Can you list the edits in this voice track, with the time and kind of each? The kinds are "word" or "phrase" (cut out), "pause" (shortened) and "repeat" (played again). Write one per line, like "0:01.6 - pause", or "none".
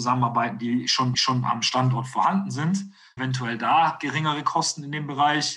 0:01.1 - repeat
0:03.2 - word